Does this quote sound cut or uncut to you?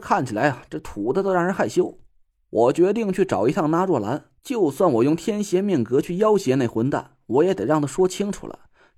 cut